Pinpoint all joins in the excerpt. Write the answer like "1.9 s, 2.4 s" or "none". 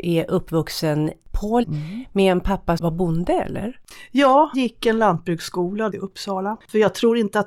1.6 s, 2.8 s, 4.5 s, 5.9 s